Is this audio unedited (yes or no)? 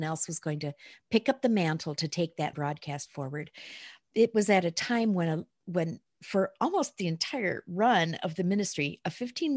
no